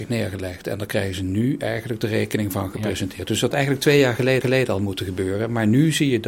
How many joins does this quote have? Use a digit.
2